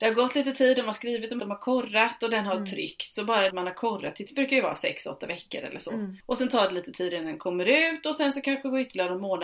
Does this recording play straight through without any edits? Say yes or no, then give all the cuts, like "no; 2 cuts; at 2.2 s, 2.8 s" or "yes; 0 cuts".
no; 4 cuts; at 1.4 s, 3.5 s, 4.3 s, 6.2 s